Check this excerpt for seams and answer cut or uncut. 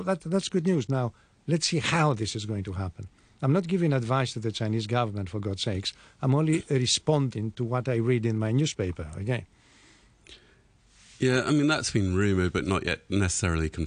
uncut